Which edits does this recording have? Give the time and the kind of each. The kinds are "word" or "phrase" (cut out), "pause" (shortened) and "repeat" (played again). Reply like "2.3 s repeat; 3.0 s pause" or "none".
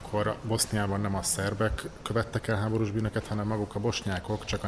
none